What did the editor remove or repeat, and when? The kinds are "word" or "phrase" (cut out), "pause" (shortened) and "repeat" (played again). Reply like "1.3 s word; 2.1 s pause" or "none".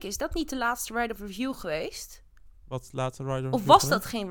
2.6 s pause